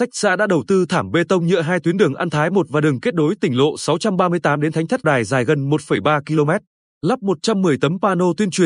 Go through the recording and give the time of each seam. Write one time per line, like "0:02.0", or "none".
0:05.0